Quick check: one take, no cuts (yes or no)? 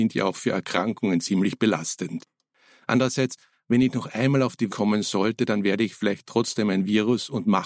no